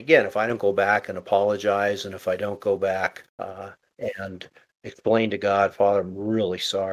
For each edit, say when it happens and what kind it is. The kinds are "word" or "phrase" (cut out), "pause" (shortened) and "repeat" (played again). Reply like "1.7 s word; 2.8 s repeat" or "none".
3.3 s pause; 4.7 s word

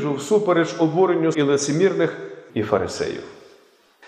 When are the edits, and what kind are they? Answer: 1.3 s word; 2.5 s word

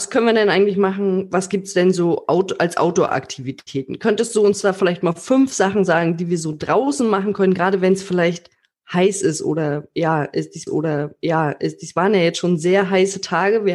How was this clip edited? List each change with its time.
10.7 s repeat

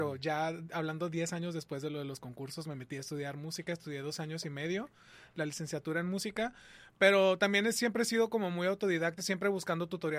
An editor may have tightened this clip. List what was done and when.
9.2 s word

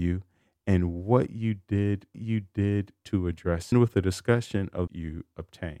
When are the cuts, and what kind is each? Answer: 2.1 s repeat; 3.7 s phrase; 4.9 s phrase

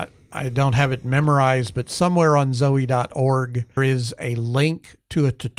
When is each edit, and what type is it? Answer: 3.8 s word

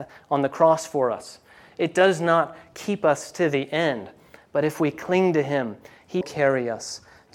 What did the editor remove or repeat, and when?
6.2 s word

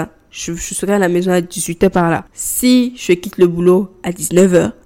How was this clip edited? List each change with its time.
2.3 s pause

